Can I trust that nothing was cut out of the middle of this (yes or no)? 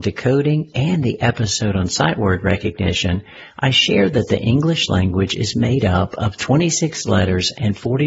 yes